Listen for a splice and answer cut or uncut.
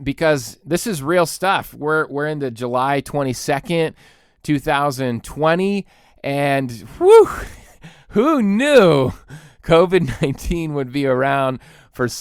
uncut